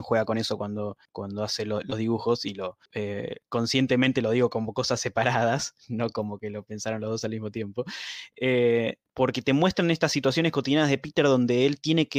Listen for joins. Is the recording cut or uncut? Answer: uncut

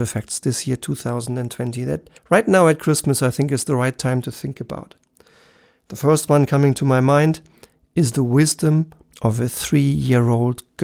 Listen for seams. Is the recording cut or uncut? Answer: cut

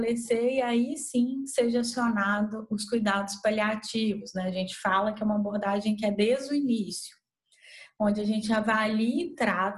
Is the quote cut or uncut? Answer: uncut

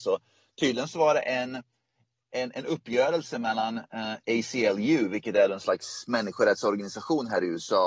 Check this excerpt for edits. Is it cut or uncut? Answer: uncut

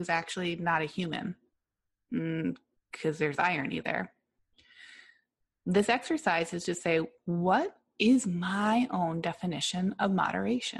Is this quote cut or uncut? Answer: uncut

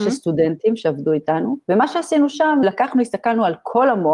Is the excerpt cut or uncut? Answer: cut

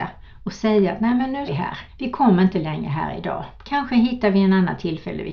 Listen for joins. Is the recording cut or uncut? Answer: cut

